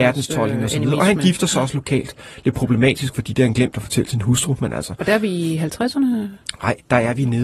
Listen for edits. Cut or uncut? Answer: uncut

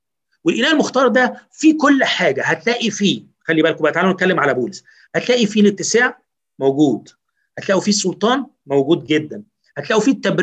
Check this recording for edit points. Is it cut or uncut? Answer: uncut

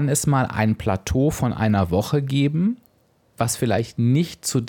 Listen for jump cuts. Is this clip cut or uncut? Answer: uncut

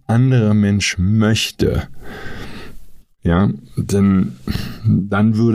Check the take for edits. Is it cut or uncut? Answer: uncut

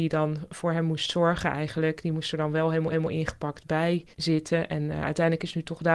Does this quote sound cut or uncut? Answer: cut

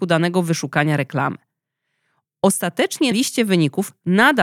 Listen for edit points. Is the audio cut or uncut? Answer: cut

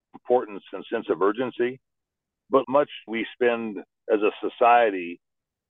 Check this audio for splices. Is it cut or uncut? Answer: cut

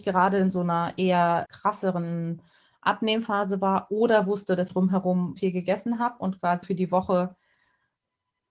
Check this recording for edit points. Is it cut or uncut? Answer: cut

